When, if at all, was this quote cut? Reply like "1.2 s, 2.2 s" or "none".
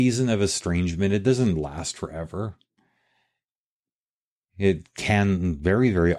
none

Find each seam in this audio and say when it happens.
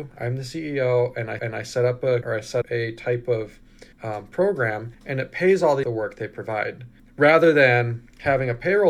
1.4 s, 2.2 s, 2.6 s, 3.9 s, 4.9 s, 5.8 s, 7.0 s

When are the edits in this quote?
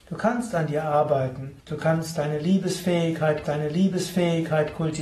1.6 s, 3.4 s

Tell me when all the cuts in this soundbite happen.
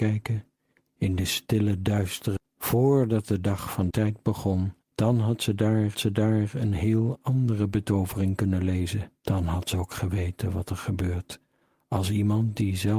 2.4 s, 3.9 s, 4.8 s, 5.9 s, 9.2 s

